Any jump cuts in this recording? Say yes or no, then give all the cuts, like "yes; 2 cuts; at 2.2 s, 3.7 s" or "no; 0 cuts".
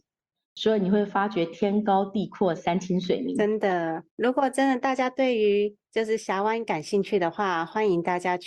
yes; 1 cut; at 4.1 s